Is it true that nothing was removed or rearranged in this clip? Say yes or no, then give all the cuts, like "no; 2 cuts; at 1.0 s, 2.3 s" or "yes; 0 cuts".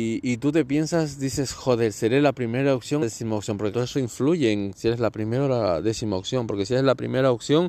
no; 2 cuts; at 3.0 s, 3.7 s